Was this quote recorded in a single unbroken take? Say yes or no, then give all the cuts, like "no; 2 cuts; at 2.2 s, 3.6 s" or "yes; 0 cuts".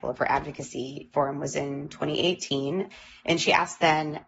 yes; 0 cuts